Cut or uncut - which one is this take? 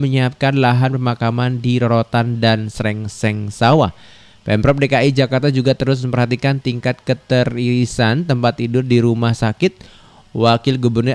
uncut